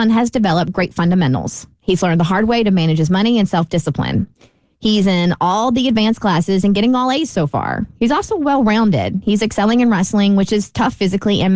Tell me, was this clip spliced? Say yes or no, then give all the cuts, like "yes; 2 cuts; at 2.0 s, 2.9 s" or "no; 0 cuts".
no; 0 cuts